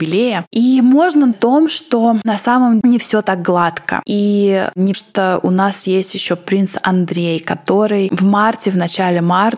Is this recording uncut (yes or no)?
no